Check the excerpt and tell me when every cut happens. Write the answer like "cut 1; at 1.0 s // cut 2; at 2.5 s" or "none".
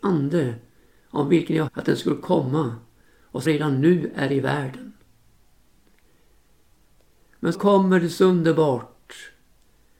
cut 1; at 1.7 s // cut 2; at 3.4 s // cut 3; at 7.5 s